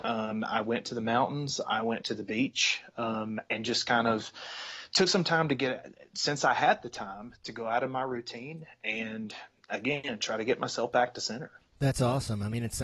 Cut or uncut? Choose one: uncut